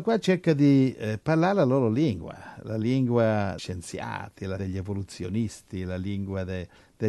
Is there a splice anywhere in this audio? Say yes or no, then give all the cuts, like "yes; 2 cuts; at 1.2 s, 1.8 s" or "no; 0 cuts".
yes; 2 cuts; at 3.6 s, 4.6 s